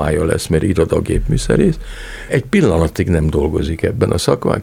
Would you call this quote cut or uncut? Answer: cut